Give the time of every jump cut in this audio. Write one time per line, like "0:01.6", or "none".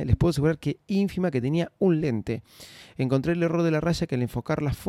none